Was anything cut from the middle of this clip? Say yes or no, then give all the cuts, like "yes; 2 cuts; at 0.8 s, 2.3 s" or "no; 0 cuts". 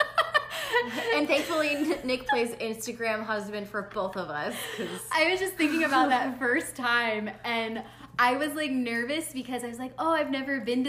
no; 0 cuts